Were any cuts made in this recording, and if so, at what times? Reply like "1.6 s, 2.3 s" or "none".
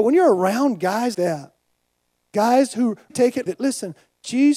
1.1 s, 3.1 s, 3.5 s